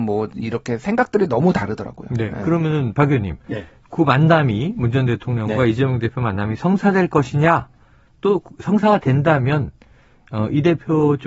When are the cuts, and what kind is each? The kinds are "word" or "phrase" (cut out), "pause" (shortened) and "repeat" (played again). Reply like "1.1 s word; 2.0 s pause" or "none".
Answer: none